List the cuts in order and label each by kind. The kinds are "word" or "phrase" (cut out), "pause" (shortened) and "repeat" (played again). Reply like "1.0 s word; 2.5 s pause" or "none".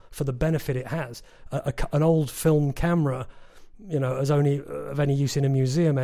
none